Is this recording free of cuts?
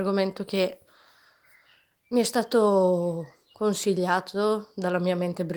yes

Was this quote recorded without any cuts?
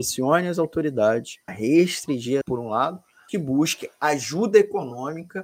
no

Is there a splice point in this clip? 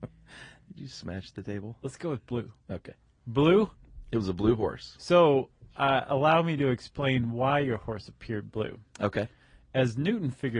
no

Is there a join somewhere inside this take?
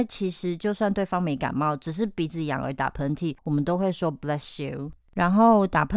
no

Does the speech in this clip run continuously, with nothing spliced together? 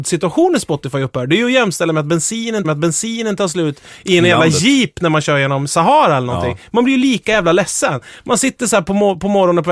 no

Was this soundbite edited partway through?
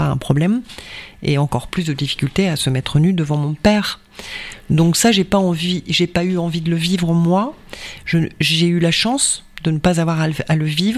no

